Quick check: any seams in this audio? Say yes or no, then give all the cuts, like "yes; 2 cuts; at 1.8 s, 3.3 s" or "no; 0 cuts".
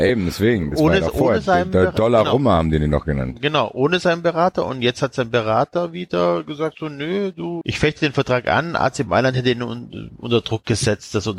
yes; 1 cut; at 7.6 s